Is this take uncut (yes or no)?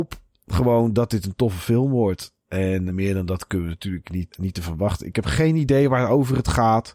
no